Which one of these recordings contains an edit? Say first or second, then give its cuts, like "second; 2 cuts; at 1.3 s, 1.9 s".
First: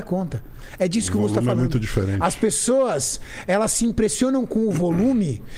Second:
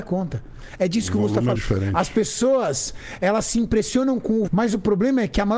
second; 2 cuts; at 1.5 s, 4.5 s